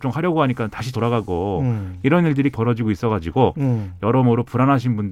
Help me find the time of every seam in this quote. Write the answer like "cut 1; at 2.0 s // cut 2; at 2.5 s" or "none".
cut 1; at 0.9 s // cut 2; at 2.5 s